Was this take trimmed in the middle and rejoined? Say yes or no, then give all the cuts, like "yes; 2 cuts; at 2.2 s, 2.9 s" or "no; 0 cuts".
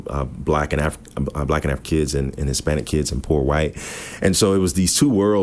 yes; 1 cut; at 1.8 s